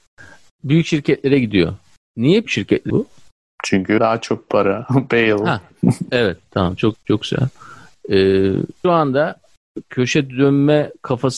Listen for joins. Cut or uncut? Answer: cut